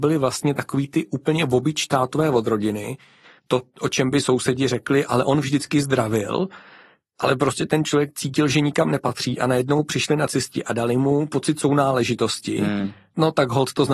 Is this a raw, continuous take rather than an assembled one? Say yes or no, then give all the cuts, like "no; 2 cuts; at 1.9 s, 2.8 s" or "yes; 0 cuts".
yes; 0 cuts